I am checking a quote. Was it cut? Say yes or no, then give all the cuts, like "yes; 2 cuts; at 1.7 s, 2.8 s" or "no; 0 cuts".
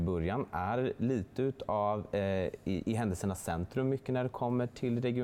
no; 0 cuts